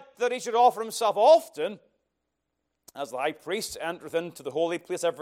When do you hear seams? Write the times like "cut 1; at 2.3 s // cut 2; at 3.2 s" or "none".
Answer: none